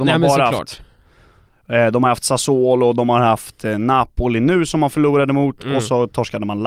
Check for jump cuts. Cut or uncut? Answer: uncut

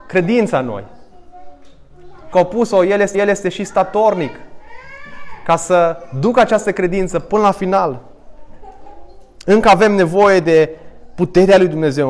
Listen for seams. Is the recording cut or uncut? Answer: cut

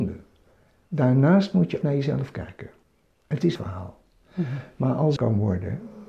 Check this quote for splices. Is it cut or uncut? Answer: cut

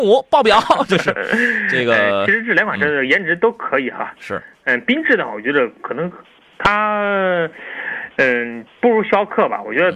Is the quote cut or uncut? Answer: uncut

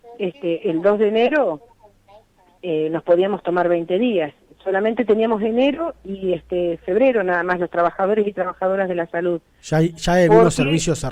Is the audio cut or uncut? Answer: uncut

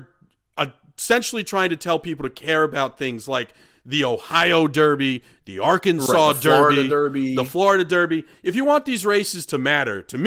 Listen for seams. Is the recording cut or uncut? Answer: uncut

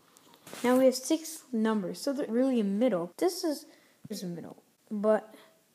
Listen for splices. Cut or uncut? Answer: cut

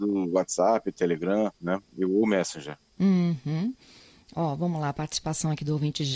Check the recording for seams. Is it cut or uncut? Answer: cut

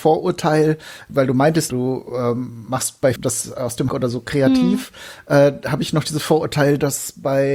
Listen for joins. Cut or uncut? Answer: cut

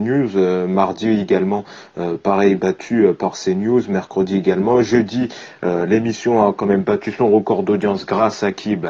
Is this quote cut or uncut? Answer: uncut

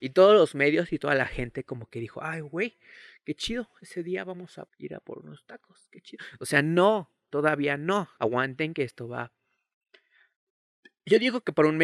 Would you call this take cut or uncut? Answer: cut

